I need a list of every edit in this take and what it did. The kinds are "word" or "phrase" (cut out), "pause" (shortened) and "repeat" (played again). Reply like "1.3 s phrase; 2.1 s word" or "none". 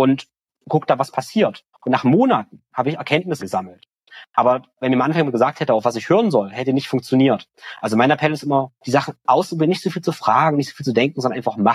1.7 s pause; 3.4 s word; 4.7 s pause; 8.8 s pause